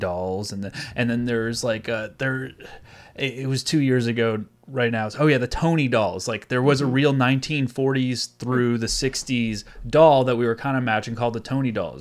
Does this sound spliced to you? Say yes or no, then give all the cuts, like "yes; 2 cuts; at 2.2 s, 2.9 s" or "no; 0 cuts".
no; 0 cuts